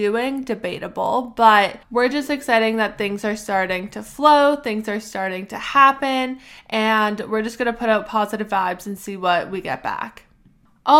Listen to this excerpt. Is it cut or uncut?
cut